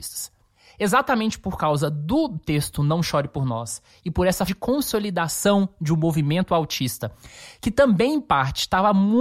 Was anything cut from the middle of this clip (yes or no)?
yes